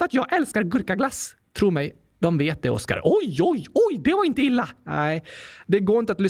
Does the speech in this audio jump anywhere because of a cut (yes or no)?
no